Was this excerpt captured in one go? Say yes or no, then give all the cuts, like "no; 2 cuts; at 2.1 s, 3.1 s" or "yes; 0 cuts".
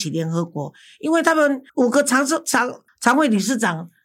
no; 1 cut; at 1.7 s